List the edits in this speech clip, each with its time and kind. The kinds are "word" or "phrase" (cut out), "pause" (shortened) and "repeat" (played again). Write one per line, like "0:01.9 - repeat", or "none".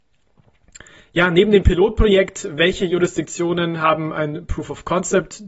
none